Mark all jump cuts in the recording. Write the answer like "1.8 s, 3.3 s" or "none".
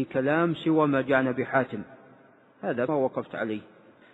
2.9 s